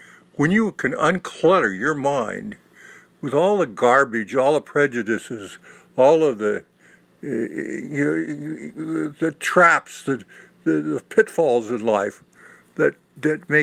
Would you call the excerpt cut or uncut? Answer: uncut